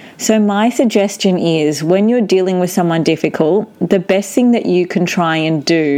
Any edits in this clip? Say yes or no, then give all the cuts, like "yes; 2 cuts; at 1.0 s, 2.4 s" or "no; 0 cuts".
no; 0 cuts